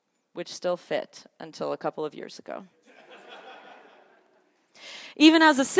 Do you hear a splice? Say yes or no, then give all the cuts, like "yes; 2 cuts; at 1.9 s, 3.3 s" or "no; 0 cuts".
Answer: no; 0 cuts